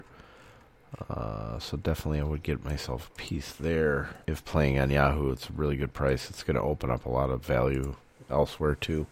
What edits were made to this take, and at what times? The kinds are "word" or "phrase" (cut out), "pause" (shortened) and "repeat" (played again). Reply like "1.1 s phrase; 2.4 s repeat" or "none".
4.2 s pause